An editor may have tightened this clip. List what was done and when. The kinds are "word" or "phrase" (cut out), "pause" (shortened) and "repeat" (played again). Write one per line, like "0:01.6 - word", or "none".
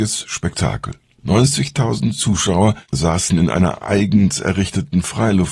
none